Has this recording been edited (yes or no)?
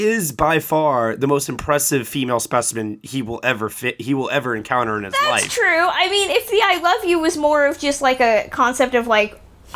no